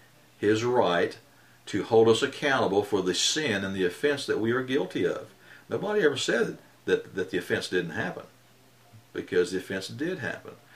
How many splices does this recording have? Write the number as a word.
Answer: zero